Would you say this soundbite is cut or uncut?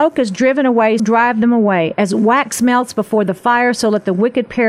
cut